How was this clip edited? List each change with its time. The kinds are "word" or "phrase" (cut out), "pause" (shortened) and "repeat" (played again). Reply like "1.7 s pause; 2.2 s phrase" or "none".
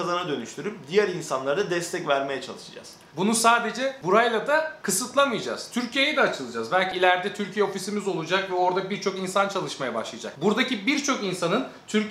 none